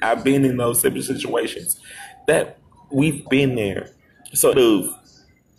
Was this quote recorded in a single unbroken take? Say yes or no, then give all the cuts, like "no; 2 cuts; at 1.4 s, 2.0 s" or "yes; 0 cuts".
no; 2 cuts; at 3.3 s, 4.5 s